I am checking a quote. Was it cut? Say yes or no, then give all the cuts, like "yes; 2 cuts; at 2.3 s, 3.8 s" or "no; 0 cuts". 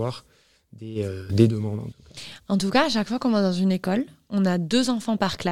no; 0 cuts